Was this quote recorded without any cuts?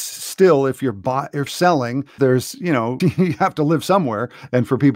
no; 3 cuts; at 1.5 s, 2.2 s, 3.0 s

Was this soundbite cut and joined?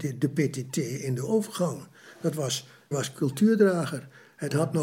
yes; 1 cut; at 2.9 s

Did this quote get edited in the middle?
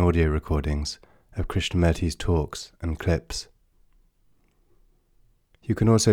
no; 0 cuts

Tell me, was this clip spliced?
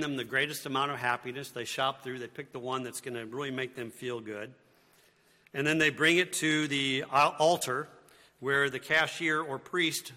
no; 0 cuts

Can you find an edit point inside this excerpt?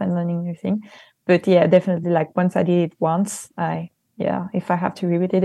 no; 0 cuts

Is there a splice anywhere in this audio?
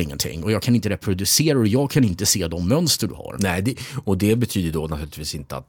no; 0 cuts

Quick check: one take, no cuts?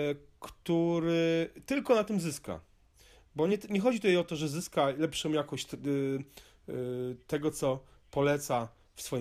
yes; 0 cuts

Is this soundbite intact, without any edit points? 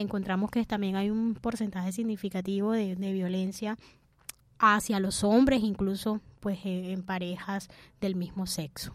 no; 1 cut; at 4.4 s

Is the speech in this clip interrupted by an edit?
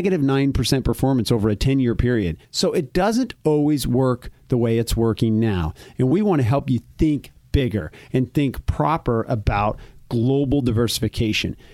yes; 1 cut; at 2.4 s

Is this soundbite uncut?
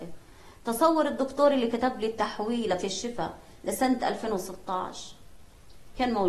yes; 0 cuts

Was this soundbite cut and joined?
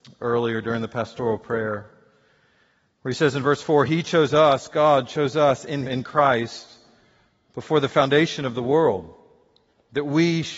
yes; 1 cut; at 5.9 s

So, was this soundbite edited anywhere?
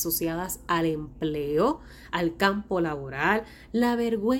no; 0 cuts

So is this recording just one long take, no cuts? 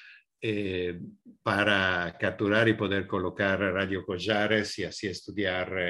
yes; 0 cuts

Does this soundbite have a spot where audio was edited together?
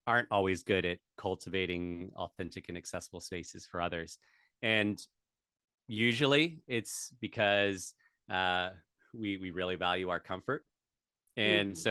no; 0 cuts

